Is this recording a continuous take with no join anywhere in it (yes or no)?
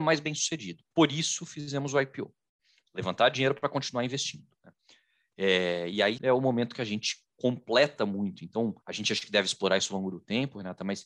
no